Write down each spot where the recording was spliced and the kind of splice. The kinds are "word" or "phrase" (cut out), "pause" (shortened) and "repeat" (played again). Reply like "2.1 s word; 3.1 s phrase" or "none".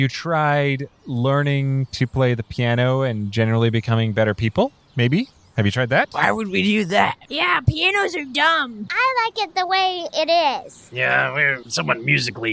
none